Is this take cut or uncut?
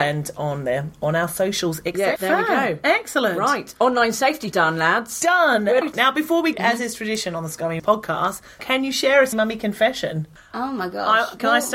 cut